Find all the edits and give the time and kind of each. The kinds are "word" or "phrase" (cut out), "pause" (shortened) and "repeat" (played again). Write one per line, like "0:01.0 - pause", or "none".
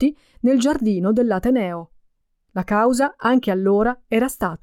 0:02.2 - pause